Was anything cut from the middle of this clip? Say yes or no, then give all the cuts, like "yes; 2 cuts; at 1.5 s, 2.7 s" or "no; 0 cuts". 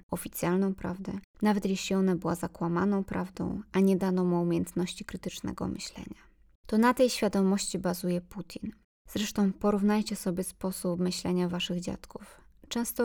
no; 0 cuts